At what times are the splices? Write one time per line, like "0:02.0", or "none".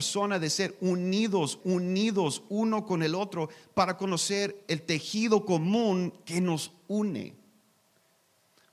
0:01.6

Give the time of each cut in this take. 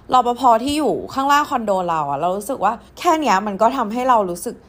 0:02.9

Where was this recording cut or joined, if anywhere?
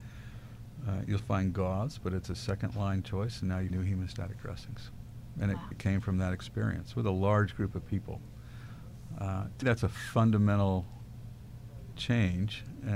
0:01.2
0:03.7
0:05.7
0:09.6

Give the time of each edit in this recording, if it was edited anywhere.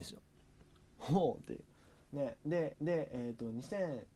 0:02.7

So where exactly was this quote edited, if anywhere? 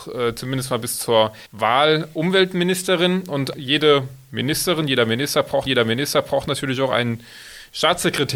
0:01.5
0:03.5
0:05.7

